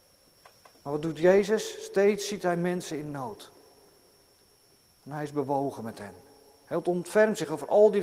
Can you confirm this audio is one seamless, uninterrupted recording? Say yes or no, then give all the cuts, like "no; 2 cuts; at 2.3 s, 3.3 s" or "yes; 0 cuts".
yes; 0 cuts